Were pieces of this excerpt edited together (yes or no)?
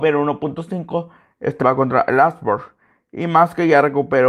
yes